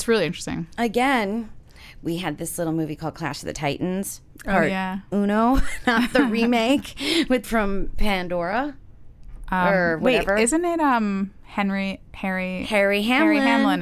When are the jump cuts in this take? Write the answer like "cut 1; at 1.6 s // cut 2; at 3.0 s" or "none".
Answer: cut 1; at 7.4 s // cut 2; at 12.1 s